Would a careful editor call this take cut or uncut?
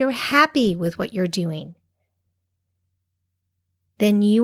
uncut